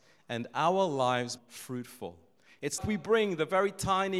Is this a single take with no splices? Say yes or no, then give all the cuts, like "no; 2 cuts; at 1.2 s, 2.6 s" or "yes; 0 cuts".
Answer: no; 2 cuts; at 1.4 s, 2.8 s